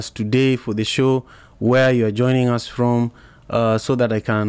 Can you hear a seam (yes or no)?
no